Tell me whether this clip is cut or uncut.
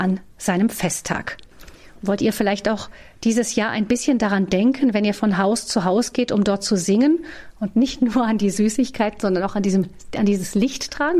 uncut